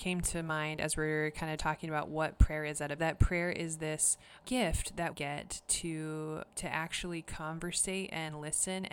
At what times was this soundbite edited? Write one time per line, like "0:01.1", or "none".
0:01.6
0:03.0
0:04.4
0:05.1
0:06.5